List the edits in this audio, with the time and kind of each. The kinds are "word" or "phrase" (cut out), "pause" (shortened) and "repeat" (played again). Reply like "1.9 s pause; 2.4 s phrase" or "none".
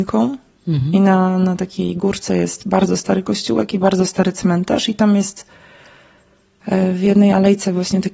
none